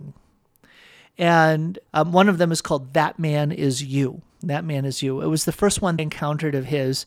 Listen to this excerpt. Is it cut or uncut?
cut